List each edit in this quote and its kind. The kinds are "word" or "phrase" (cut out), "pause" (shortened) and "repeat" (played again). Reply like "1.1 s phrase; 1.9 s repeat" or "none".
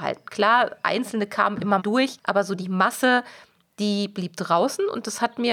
1.8 s word